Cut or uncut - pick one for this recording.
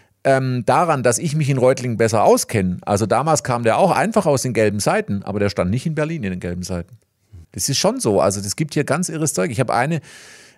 cut